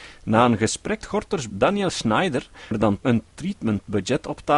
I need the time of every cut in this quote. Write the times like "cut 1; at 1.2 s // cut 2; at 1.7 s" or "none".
cut 1; at 1.0 s // cut 2; at 1.5 s // cut 3; at 2.7 s // cut 4; at 3.0 s